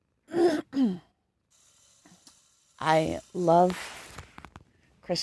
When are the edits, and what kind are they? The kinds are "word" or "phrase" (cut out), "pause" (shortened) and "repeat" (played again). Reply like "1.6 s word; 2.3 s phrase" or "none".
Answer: 1.1 s pause